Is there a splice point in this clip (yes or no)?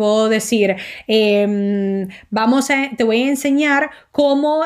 no